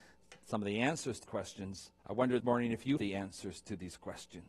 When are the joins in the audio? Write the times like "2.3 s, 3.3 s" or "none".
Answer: 1.2 s, 2.0 s, 2.4 s, 3.0 s